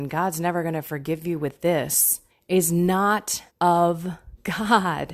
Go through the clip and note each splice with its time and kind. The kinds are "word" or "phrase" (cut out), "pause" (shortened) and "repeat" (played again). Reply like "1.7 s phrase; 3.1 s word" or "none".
2.3 s pause; 3.5 s pause